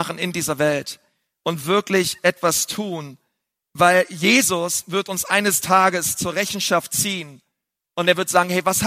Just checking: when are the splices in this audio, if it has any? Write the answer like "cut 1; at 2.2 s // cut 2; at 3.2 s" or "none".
none